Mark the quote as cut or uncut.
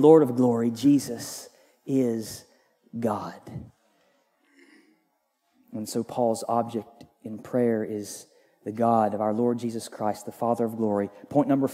uncut